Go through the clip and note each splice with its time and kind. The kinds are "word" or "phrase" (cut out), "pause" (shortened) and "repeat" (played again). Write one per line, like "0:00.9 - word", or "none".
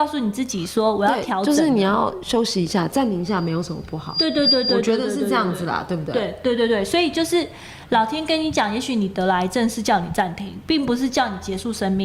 none